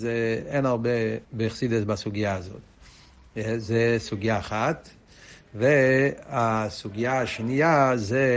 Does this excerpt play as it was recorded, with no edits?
no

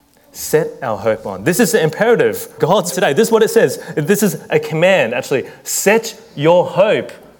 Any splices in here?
yes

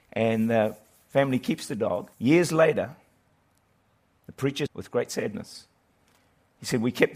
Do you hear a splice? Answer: yes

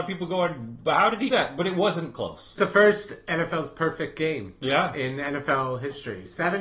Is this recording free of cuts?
no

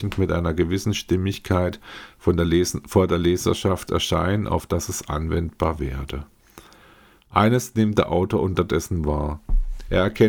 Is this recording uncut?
yes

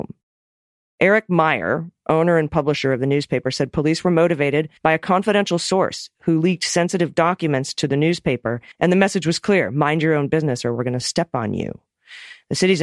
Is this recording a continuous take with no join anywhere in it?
no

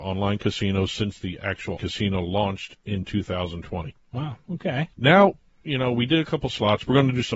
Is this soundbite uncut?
no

